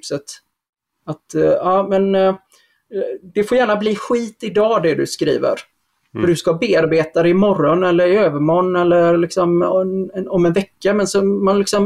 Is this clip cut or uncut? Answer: uncut